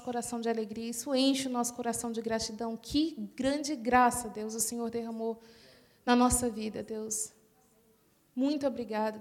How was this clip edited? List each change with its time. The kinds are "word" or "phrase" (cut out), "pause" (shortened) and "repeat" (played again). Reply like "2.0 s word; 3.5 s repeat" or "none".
none